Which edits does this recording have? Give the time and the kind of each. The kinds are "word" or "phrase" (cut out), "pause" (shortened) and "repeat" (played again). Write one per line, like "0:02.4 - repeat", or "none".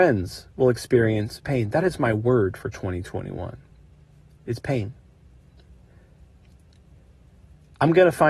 none